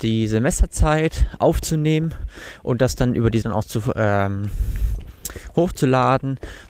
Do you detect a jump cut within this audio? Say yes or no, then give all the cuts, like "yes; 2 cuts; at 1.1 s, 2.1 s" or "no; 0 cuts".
yes; 1 cut; at 3.4 s